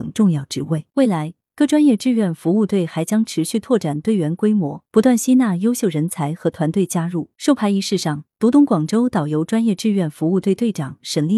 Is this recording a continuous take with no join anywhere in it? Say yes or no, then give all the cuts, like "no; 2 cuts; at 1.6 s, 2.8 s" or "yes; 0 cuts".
no; 3 cuts; at 0.9 s, 4.9 s, 7.3 s